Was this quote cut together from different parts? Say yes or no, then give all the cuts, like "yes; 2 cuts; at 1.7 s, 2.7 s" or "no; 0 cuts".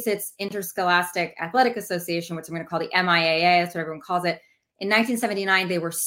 no; 0 cuts